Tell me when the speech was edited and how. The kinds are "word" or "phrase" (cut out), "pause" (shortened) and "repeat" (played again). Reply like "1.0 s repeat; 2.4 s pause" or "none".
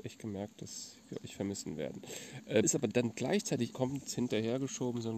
2.6 s word; 3.7 s word